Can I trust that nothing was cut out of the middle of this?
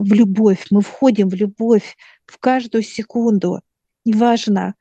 yes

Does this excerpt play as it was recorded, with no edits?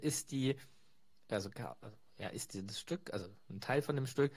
yes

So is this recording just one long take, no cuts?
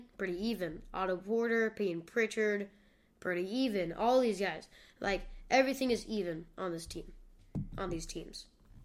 yes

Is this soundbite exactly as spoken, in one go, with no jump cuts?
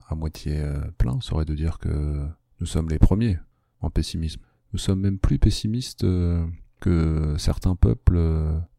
yes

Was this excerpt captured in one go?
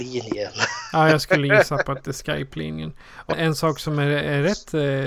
no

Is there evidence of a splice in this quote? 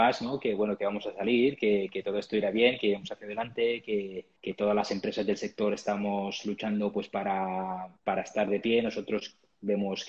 yes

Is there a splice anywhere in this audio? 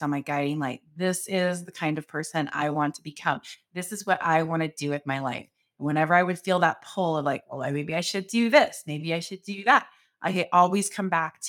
no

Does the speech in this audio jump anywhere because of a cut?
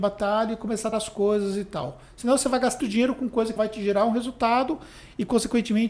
yes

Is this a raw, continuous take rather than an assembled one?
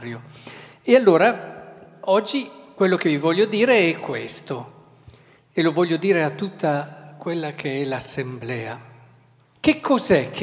yes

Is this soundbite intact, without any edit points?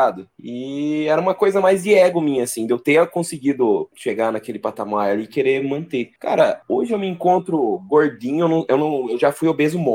yes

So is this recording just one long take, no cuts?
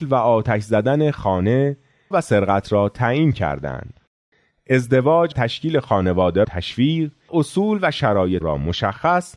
no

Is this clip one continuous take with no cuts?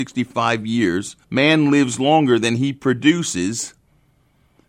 no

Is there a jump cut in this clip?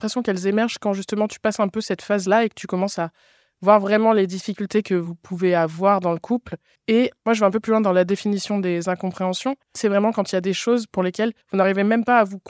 yes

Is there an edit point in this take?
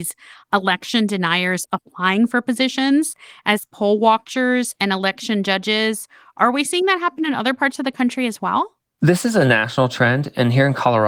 no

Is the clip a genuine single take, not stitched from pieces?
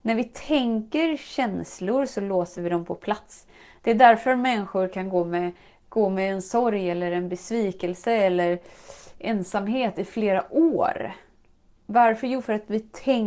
yes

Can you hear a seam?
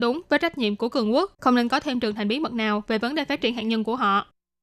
yes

